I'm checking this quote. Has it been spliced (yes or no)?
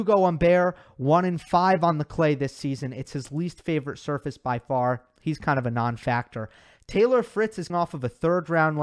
yes